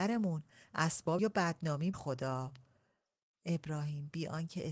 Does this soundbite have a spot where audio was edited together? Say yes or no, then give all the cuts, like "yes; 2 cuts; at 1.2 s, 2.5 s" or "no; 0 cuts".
yes; 2 cuts; at 1.2 s, 1.9 s